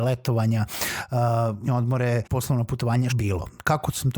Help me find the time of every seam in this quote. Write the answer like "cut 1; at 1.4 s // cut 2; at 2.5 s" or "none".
cut 1; at 1.7 s // cut 2; at 2.2 s // cut 3; at 3.1 s